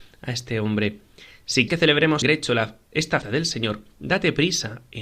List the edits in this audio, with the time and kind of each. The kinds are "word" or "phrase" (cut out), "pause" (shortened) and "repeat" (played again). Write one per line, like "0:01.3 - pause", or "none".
0:01.7 - word
0:02.2 - word
0:03.2 - word